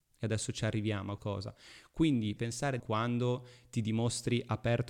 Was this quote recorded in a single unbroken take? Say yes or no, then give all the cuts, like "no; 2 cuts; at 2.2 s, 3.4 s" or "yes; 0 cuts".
no; 3 cuts; at 1.2 s, 2.4 s, 2.8 s